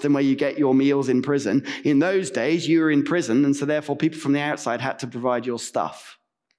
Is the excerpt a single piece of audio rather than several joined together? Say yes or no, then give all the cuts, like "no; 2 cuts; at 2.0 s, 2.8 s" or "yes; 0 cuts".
yes; 0 cuts